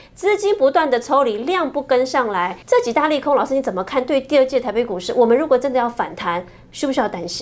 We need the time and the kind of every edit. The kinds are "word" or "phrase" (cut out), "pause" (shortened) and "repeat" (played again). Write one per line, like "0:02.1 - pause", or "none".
0:02.6 - pause